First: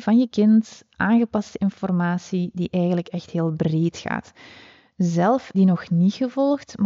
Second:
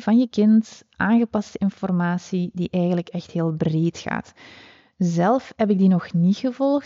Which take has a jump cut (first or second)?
first